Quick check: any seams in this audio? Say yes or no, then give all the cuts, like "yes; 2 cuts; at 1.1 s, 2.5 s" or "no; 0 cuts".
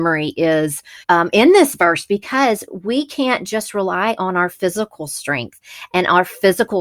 yes; 1 cut; at 1.0 s